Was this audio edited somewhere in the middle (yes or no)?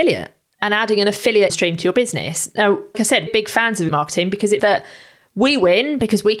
yes